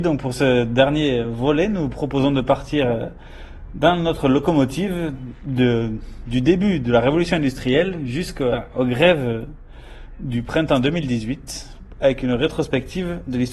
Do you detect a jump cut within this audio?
no; 0 cuts

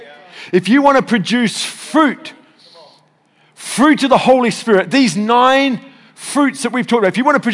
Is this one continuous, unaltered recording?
yes; 0 cuts

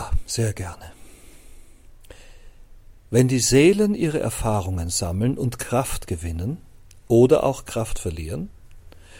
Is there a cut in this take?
no; 0 cuts

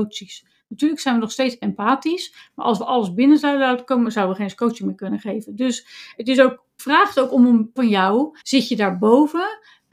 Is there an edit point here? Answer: yes; 4 cuts; at 1.6 s, 6.8 s, 7.8 s, 8.4 s

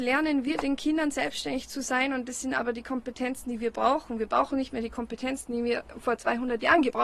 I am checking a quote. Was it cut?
no; 0 cuts

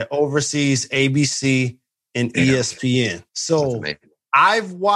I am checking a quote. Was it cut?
yes; 1 cut; at 3.3 s

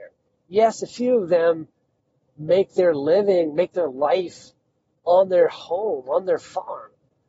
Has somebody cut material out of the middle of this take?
no; 0 cuts

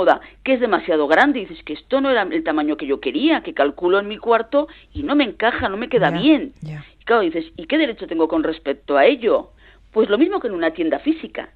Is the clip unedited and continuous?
yes; 0 cuts

